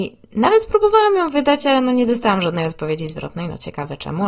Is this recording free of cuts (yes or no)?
yes